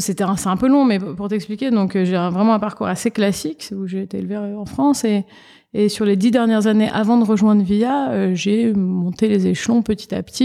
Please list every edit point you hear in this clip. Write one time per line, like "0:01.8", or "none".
none